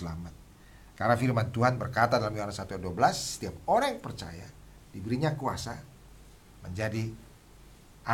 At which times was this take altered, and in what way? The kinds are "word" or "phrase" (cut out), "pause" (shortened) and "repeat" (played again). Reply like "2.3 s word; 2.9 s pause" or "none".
none